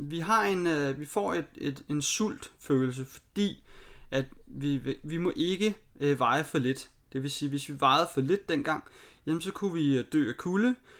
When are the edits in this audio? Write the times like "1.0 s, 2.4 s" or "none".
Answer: none